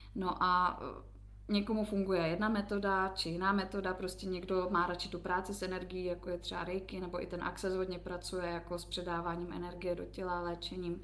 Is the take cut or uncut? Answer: uncut